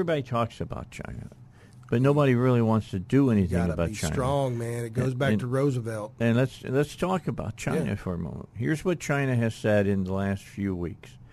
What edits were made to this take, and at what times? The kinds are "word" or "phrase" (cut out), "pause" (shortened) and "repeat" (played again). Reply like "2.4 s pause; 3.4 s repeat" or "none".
none